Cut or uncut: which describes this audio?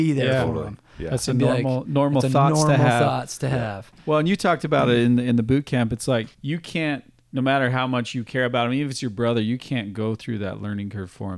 cut